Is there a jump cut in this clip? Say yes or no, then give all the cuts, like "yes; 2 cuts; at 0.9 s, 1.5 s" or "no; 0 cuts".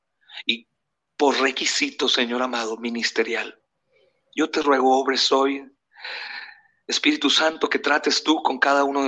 no; 0 cuts